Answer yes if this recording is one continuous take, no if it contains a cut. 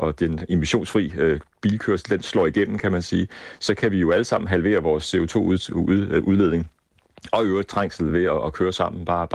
yes